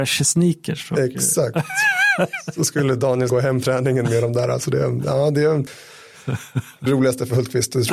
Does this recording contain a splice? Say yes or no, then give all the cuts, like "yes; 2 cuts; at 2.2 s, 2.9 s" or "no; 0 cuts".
yes; 3 cuts; at 3.3 s, 3.6 s, 6.9 s